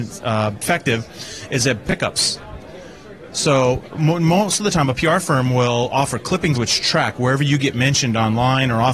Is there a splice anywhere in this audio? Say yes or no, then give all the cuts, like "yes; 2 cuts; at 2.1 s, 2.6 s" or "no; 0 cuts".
yes; 3 cuts; at 1.8 s, 3.9 s, 6.5 s